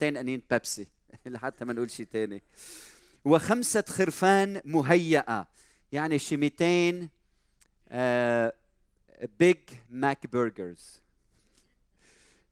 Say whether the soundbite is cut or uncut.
uncut